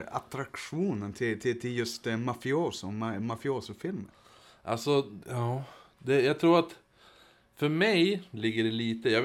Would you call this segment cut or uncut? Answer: uncut